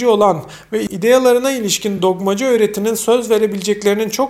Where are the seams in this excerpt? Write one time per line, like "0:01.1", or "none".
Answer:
none